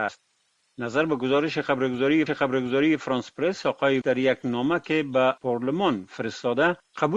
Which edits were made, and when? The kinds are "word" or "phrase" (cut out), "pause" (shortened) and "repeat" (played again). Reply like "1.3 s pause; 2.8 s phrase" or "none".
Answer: 2.3 s repeat; 4.0 s word; 5.4 s pause